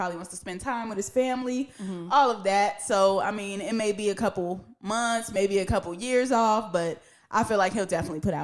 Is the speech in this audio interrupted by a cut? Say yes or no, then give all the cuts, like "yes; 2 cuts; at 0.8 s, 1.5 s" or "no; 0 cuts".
no; 0 cuts